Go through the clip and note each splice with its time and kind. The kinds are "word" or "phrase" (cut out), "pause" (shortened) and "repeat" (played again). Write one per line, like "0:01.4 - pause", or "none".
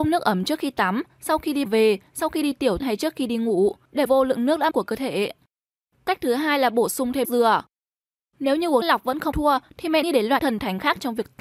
0:01.6 - word
0:02.8 - word
0:04.1 - word
0:04.7 - word
0:07.2 - word
0:08.8 - word
0:09.3 - word
0:10.0 - word
0:10.4 - word